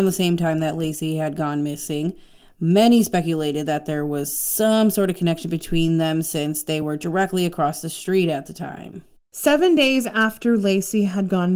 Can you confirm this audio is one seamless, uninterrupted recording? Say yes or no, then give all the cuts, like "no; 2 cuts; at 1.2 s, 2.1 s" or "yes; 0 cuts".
yes; 0 cuts